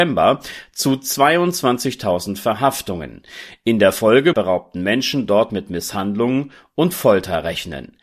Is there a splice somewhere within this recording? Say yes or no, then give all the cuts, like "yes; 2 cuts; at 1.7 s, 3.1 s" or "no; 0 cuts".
yes; 1 cut; at 4.3 s